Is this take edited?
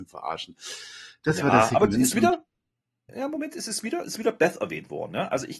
no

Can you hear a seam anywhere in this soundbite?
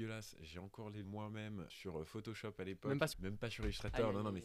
yes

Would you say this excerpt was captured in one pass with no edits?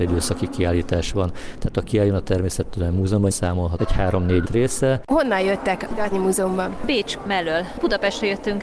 no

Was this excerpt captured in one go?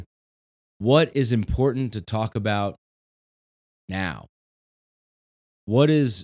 yes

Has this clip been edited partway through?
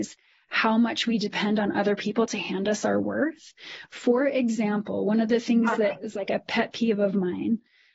no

